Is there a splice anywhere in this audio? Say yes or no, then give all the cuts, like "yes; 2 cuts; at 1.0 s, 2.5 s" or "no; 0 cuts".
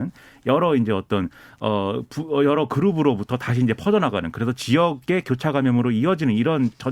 no; 0 cuts